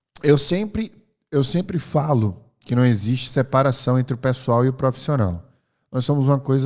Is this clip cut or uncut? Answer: uncut